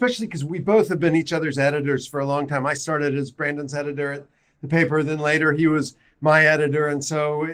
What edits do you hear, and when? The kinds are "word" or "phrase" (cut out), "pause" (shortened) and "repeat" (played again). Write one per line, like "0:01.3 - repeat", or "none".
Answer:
none